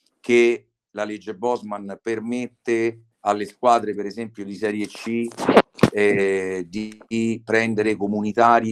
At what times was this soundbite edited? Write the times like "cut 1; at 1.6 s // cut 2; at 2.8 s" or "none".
cut 1; at 3.1 s // cut 2; at 7.0 s